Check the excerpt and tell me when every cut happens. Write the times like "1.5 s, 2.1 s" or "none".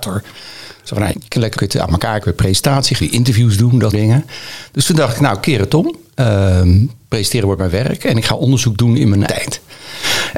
1.1 s, 1.6 s, 2.2 s, 3.0 s, 3.9 s, 9.3 s